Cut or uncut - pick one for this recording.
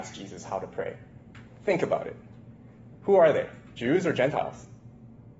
uncut